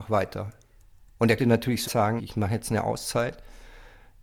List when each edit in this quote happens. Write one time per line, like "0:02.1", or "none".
0:01.4
0:01.8
0:02.2

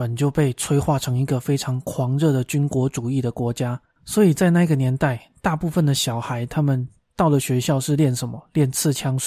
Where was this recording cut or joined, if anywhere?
0:03.8

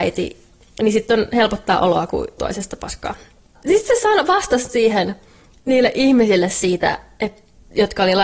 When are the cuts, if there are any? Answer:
0:02.4

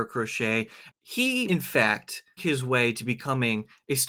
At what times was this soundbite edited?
0:01.5
0:02.4

